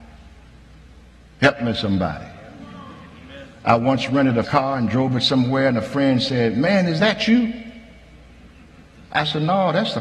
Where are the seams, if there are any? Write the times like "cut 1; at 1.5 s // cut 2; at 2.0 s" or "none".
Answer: cut 1; at 4.4 s